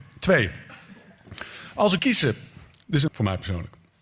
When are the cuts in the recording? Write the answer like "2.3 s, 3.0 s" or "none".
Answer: 2.0 s, 3.1 s